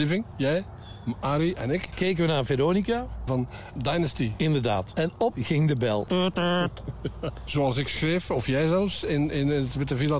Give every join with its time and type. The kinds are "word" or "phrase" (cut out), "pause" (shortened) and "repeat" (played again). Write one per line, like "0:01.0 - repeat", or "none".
0:03.3 - phrase
0:03.8 - word
0:05.3 - phrase